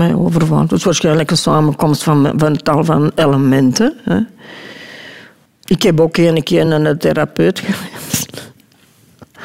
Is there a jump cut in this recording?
no; 0 cuts

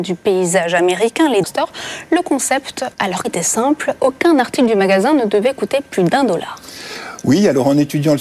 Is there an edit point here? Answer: yes; 3 cuts; at 1.4 s, 2.9 s, 3.2 s

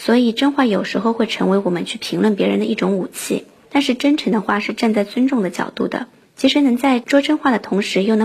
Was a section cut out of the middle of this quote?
no; 0 cuts

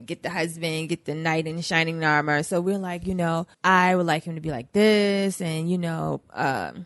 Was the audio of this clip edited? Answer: yes; 1 cut; at 3.5 s

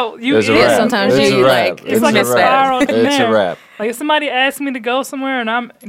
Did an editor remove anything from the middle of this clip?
yes; 1 cut; at 2.9 s

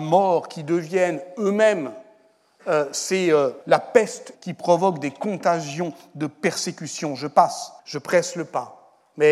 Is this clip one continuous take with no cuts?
no; 3 cuts; at 3.6 s, 4.3 s, 7.8 s

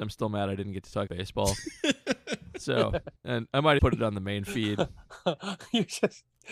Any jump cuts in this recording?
yes; 3 cuts; at 1.1 s, 3.2 s, 3.8 s

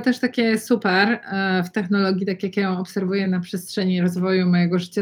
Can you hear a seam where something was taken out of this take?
no; 0 cuts

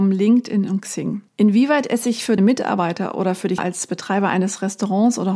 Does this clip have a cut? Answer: yes; 3 cuts; at 1.3 s, 2.4 s, 3.6 s

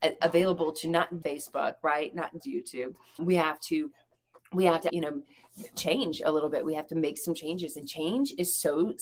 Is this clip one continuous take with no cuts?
no; 4 cuts; at 1.2 s, 2.4 s, 3.2 s, 4.9 s

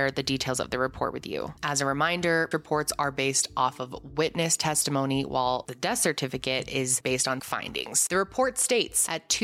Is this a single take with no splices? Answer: no; 2 cuts; at 2.5 s, 7.4 s

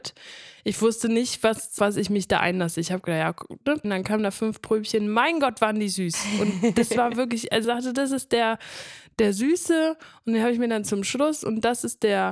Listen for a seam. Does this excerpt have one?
yes; 3 cuts; at 1.8 s, 3.8 s, 7.6 s

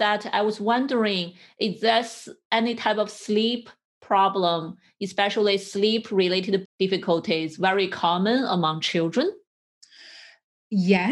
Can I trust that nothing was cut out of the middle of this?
no; 1 cut; at 6.6 s

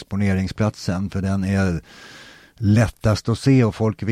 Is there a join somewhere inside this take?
no; 0 cuts

